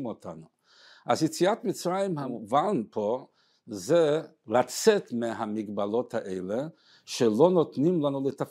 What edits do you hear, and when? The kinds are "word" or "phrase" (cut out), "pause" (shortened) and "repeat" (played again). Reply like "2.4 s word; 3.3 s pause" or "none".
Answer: none